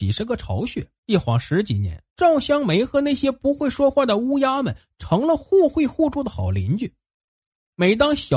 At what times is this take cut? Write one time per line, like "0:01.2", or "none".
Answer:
0:01.0
0:02.1